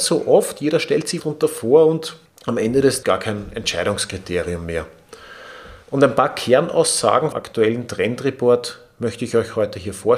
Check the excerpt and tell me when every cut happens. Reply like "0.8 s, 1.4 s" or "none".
1.2 s, 2.3 s, 3.0 s, 5.8 s, 7.3 s